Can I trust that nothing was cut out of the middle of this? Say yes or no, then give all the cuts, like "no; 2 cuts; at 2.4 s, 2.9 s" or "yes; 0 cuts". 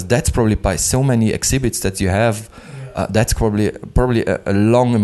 yes; 0 cuts